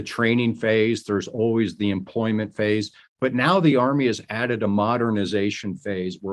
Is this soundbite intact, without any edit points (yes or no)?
yes